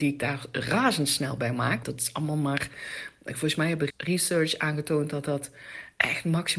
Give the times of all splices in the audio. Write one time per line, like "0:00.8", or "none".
0:01.8
0:03.9